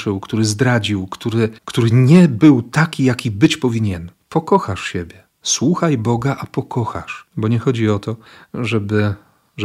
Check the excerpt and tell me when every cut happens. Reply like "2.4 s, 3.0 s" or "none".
1.6 s, 4.2 s, 7.3 s

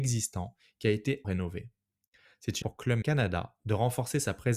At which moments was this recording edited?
1.2 s, 2.6 s, 3.0 s

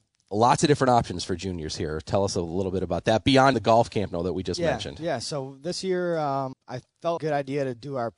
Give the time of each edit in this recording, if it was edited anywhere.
3.5 s, 6.5 s, 7.2 s

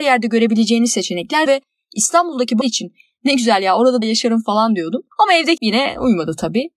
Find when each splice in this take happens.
1.5 s, 2.6 s, 4.0 s, 5.1 s, 5.6 s

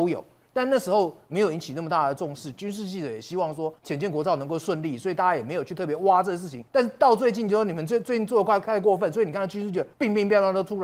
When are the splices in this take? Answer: 3.8 s, 6.7 s, 9.9 s

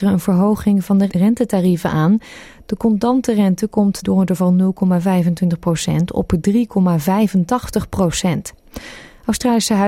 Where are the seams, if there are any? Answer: 1.1 s, 4.0 s, 4.4 s

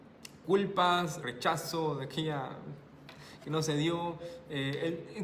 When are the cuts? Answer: 1.2 s

